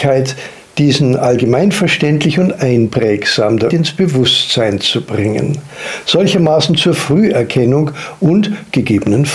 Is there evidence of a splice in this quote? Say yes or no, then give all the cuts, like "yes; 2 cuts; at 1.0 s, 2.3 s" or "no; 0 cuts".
yes; 1 cut; at 3.7 s